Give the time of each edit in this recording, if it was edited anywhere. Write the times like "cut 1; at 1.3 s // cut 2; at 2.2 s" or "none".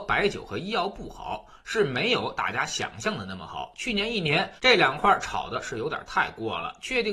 cut 1; at 4.6 s